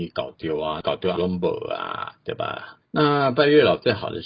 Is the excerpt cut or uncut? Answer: cut